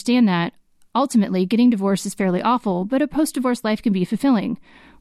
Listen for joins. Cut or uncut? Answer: uncut